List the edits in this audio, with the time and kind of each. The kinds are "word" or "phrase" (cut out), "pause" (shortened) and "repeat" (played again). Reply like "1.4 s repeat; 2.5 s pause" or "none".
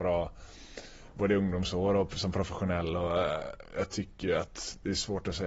none